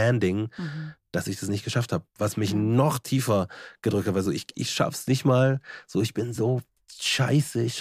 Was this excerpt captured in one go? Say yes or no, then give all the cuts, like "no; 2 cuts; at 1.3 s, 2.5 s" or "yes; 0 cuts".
yes; 0 cuts